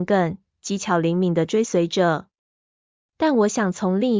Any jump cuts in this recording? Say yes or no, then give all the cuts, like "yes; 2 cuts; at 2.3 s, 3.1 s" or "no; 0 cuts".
no; 0 cuts